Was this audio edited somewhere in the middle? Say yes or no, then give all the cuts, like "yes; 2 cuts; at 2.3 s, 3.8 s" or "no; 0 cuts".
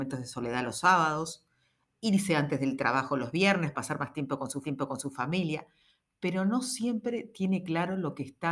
yes; 2 cuts; at 3.7 s, 4.6 s